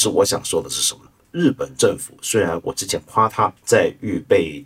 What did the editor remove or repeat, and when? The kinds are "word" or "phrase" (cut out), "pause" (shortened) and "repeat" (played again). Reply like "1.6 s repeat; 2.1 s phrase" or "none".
3.6 s pause